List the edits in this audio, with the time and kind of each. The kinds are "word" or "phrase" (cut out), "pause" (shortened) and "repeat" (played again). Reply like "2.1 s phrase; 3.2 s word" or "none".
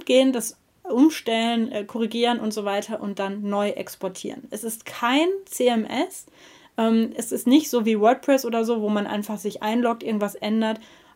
none